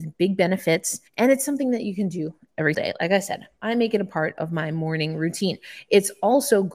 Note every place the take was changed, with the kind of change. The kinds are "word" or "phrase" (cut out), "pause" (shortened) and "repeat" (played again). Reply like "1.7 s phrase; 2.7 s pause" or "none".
1.1 s pause; 2.7 s word